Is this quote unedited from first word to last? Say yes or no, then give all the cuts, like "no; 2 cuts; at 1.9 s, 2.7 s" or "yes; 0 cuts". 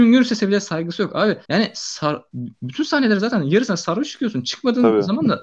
no; 1 cut; at 1.4 s